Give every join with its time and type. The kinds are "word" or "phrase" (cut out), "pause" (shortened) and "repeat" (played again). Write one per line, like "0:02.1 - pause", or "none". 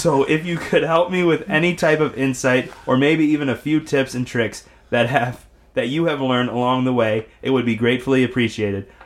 none

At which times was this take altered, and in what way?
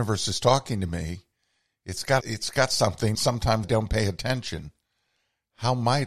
0:02.2 - word
0:03.1 - word
0:03.6 - word

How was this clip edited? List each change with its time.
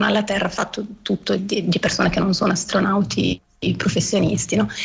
0:01.4 - phrase

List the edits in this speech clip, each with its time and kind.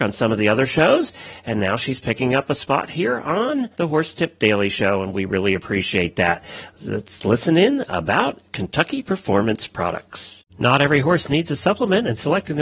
0:03.7 - pause
0:10.5 - pause

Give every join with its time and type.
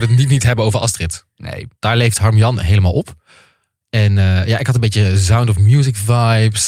0:01.8 - pause

